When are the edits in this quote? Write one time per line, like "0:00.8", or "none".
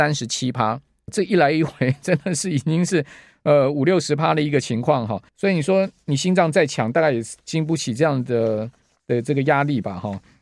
0:01.1
0:05.3